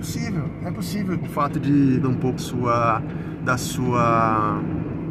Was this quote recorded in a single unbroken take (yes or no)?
no